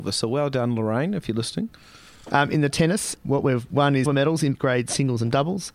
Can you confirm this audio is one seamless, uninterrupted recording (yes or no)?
no